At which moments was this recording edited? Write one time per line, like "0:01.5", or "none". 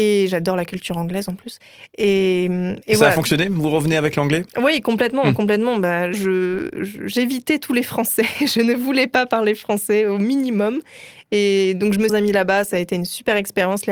0:04.5
0:06.1
0:12.1